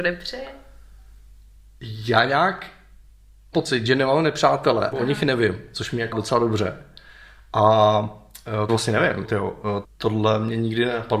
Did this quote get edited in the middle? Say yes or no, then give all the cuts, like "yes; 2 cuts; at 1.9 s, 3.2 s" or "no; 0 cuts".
yes; 6 cuts; at 3.5 s, 4.9 s, 6.1 s, 8.7 s, 9.2 s, 9.8 s